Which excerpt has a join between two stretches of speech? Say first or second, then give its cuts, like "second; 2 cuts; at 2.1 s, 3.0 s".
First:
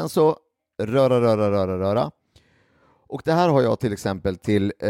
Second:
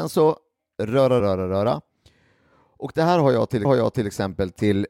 second; 2 cuts; at 1.2 s, 3.6 s